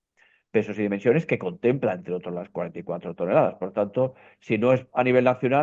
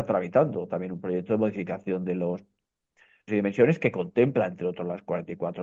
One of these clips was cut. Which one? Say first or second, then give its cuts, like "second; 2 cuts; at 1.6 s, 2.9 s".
second; 1 cut; at 3.3 s